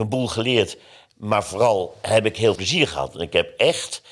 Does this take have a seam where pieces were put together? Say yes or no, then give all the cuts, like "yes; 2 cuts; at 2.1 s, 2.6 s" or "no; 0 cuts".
yes; 1 cut; at 2.6 s